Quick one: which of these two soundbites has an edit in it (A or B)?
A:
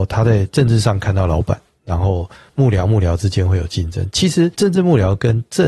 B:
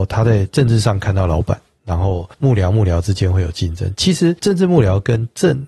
B